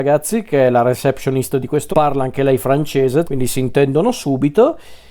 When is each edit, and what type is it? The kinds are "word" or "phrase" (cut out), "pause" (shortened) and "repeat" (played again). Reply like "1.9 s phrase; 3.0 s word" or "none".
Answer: 1.9 s phrase; 3.2 s phrase